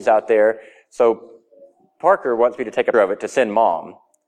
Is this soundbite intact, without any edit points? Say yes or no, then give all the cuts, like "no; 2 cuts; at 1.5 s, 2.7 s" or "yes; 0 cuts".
no; 1 cut; at 2.9 s